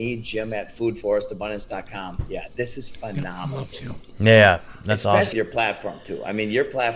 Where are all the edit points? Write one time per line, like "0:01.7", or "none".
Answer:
0:05.3